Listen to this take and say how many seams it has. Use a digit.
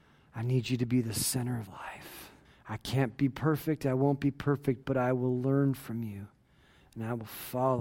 2